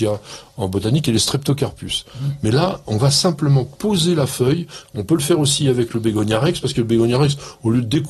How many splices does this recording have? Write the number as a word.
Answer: zero